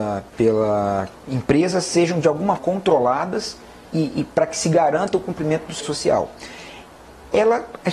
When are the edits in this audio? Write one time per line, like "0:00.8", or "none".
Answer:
0:02.6
0:03.9
0:05.8